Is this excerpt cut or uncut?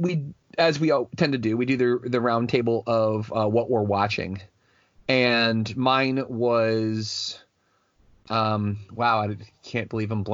uncut